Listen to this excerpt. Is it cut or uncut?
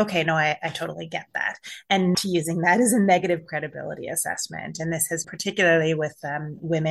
cut